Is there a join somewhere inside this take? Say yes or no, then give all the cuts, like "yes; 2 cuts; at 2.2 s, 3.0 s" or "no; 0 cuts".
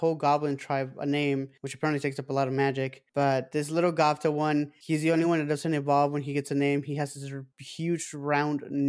no; 0 cuts